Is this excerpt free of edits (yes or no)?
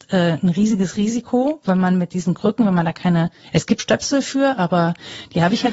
no